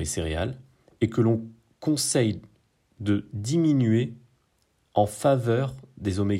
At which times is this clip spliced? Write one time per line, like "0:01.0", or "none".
none